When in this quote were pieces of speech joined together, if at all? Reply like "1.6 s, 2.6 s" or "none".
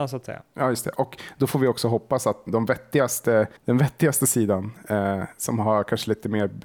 2.5 s, 3.6 s